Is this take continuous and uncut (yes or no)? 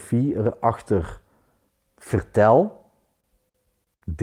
no